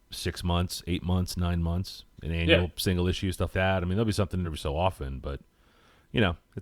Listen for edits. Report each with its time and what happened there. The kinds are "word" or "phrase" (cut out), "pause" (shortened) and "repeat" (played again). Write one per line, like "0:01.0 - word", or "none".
0:03.5 - word
0:04.4 - word